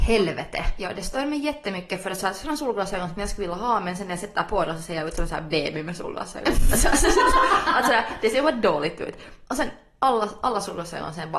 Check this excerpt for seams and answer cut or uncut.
uncut